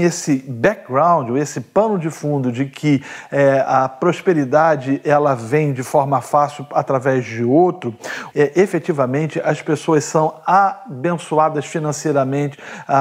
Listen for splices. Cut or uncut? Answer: cut